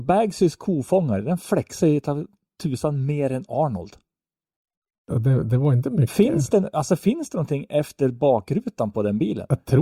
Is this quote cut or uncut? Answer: uncut